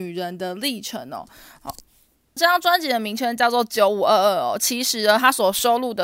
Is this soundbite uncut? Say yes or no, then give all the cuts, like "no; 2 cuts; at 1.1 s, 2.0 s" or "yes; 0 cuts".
no; 1 cut; at 2.4 s